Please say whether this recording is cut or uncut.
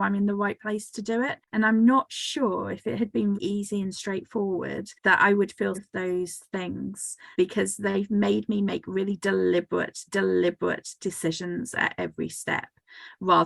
cut